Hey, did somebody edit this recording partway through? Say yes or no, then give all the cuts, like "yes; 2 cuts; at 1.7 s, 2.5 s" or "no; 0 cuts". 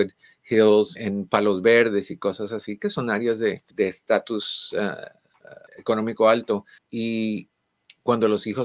yes; 4 cuts; at 1.0 s, 3.7 s, 5.7 s, 6.8 s